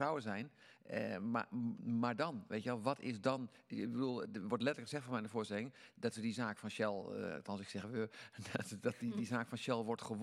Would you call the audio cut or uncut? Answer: uncut